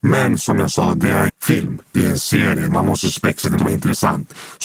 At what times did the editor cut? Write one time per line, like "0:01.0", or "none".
0:01.3
0:03.6